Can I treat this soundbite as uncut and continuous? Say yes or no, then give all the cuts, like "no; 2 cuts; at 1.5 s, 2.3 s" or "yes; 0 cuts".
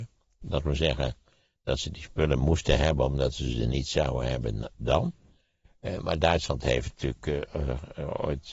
yes; 0 cuts